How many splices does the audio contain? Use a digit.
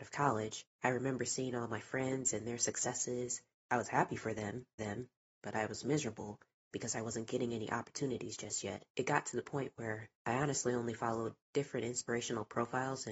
2